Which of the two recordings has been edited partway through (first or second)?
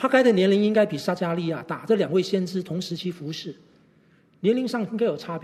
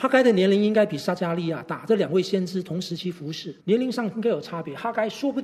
second